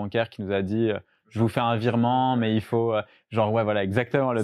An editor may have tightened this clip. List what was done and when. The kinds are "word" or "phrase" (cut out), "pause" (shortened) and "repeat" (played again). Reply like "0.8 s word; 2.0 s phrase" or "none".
none